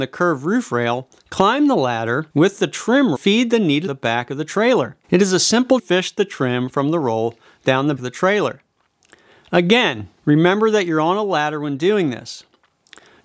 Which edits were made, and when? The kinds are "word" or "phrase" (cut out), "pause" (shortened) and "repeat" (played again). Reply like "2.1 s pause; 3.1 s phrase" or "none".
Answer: 1.2 s pause; 2.3 s pause; 3.1 s phrase; 3.9 s phrase; 5.0 s pause; 5.8 s phrase; 8.0 s word; 10.2 s pause